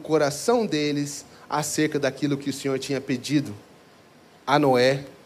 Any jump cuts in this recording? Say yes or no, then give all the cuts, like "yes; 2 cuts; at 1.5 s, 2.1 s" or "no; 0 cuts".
no; 0 cuts